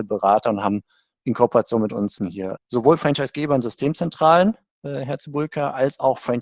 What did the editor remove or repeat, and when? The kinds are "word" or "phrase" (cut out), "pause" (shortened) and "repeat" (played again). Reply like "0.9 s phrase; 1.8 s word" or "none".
2.2 s word; 2.6 s word; 4.7 s pause

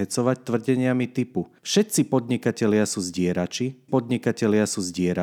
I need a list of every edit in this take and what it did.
1.6 s pause; 3.9 s repeat

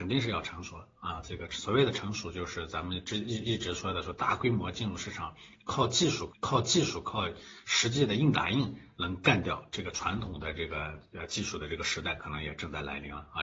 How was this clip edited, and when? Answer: 6.3 s repeat

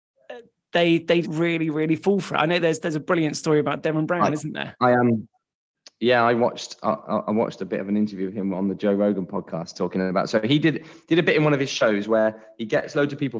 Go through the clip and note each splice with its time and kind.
1.2 s word

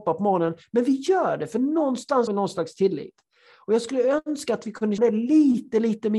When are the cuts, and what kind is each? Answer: 2.3 s word; 5.0 s word

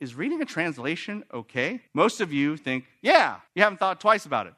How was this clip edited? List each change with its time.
1.9 s pause; 3.5 s pause

